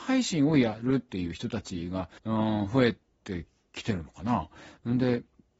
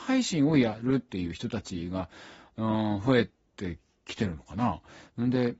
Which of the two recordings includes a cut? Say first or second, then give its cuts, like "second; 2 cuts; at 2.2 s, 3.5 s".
first; 1 cut; at 2.2 s